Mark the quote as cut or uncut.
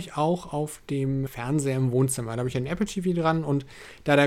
cut